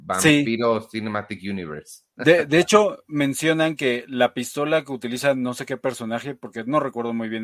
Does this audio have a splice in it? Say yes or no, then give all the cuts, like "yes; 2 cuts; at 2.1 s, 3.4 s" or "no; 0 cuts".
no; 0 cuts